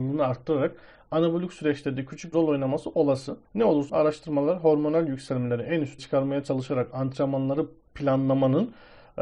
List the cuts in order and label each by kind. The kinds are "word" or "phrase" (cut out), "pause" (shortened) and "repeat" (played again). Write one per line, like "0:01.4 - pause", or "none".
0:02.3 - word
0:03.5 - pause
0:03.9 - word
0:06.0 - word
0:07.8 - pause